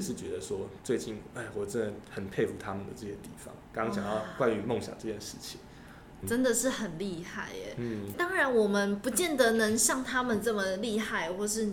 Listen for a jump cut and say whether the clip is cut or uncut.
cut